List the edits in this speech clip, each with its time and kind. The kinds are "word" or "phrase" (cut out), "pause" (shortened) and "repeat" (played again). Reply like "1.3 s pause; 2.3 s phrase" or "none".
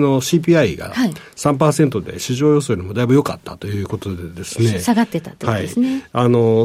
none